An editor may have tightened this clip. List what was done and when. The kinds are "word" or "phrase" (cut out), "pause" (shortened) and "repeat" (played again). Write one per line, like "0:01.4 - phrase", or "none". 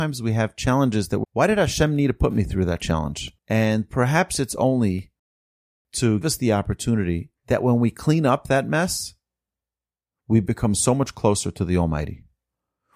0:01.2 - word
0:03.4 - pause
0:06.2 - word
0:07.4 - pause